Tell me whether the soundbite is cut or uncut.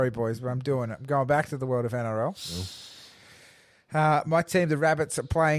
uncut